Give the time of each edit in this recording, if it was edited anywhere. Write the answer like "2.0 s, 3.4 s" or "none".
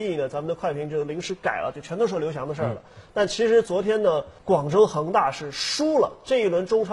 4.4 s